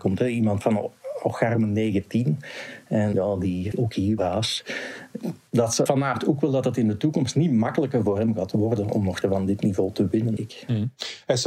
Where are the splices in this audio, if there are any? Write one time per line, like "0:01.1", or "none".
0:03.1
0:03.7
0:04.2
0:05.9
0:09.2
0:10.4